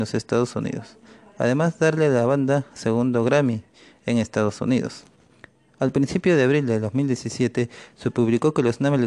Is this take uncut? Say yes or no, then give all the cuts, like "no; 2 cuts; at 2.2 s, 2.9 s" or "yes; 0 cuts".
yes; 0 cuts